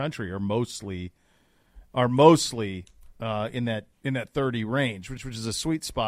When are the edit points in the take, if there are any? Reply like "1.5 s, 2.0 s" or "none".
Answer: 3.9 s, 5.2 s